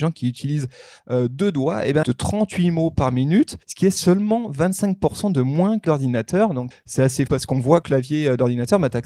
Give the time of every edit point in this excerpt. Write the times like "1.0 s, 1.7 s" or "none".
2.0 s, 3.6 s, 5.8 s, 6.7 s, 7.3 s, 7.8 s